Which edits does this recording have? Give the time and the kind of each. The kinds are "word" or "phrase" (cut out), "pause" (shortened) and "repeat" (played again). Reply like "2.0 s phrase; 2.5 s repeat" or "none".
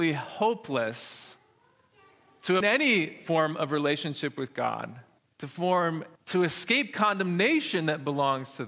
2.6 s word; 5.2 s pause; 6.2 s pause